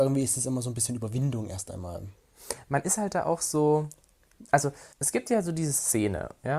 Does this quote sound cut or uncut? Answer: cut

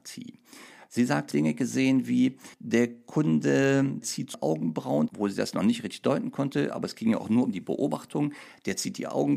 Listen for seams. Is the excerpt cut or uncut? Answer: cut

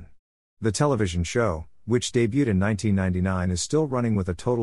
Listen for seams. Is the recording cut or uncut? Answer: uncut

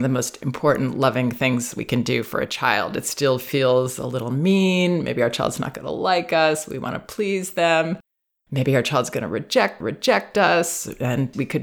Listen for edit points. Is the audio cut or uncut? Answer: cut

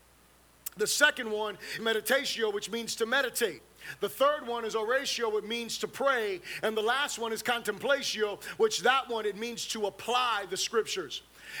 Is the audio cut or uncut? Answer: cut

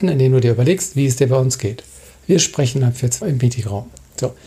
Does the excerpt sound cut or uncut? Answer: cut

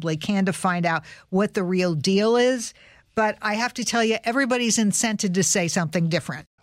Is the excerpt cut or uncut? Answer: uncut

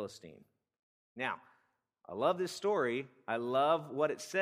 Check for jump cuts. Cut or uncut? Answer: uncut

